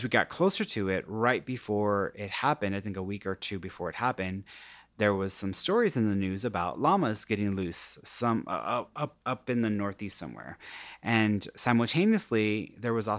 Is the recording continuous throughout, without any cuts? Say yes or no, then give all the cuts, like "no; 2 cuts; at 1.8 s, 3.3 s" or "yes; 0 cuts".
no; 1 cut; at 9.2 s